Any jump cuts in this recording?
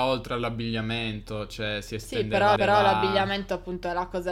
yes; 1 cut; at 2.6 s

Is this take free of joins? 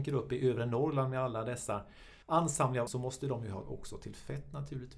no; 3 cuts; at 2.2 s, 2.9 s, 3.6 s

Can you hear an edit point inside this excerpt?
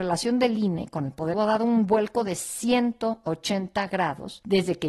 yes; 1 cut; at 1.3 s

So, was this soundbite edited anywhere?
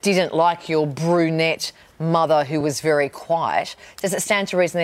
no; 0 cuts

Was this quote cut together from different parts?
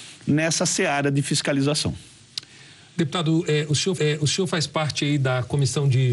yes; 1 cut; at 4.0 s

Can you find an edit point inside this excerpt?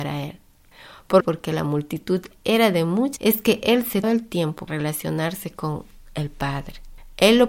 yes; 4 cuts; at 1.2 s, 3.2 s, 4.0 s, 4.7 s

